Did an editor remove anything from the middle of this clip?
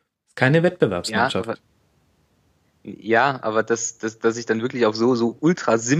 no; 0 cuts

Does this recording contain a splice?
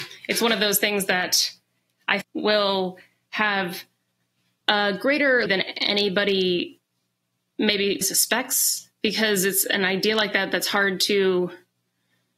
yes; 3 cuts; at 2.2 s, 5.5 s, 8.0 s

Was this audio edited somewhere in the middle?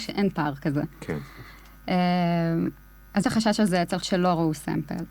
yes; 2 cuts; at 3.2 s, 4.0 s

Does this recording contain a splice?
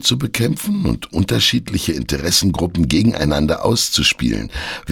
no; 0 cuts

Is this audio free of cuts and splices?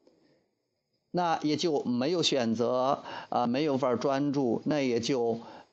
yes; 0 cuts

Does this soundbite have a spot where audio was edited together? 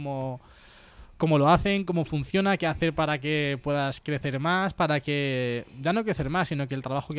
no; 0 cuts

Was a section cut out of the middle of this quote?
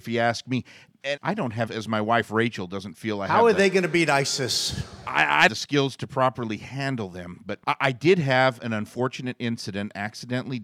yes; 4 cuts; at 1.2 s, 1.7 s, 5.5 s, 7.6 s

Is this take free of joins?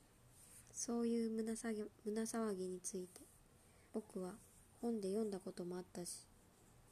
no; 2 cuts; at 1.9 s, 3.9 s

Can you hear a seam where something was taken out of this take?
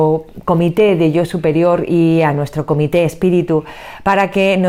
no; 0 cuts

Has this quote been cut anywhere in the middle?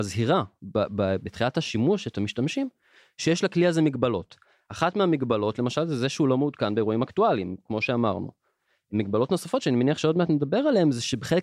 no; 0 cuts

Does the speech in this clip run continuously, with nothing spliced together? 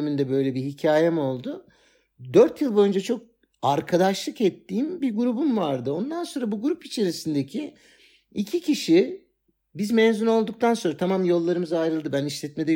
yes; 0 cuts

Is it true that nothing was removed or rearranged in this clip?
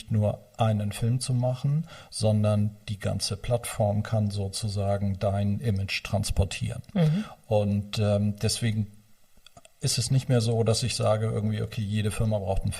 yes; 0 cuts

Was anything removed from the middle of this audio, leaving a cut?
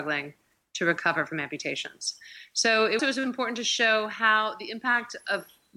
yes; 1 cut; at 3.0 s

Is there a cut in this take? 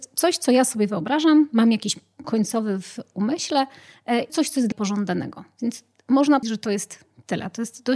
yes; 4 cuts; at 2.2 s, 4.3 s, 4.7 s, 6.4 s

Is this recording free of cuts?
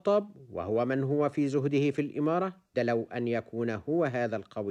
no; 1 cut; at 2.7 s

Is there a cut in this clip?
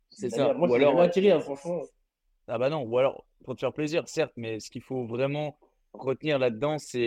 no; 0 cuts

